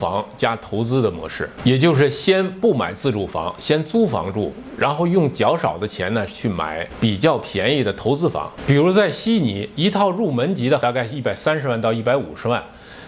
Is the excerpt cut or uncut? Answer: cut